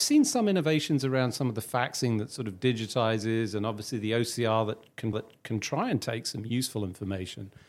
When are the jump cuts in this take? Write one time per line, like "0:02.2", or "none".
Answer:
0:05.1